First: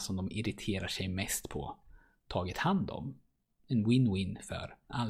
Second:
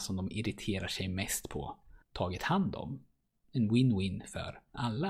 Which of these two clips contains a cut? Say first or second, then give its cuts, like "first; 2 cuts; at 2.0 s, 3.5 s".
second; 1 cut; at 2.0 s